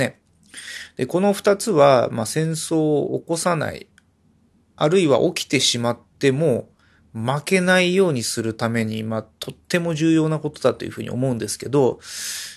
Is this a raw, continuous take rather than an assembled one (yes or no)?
yes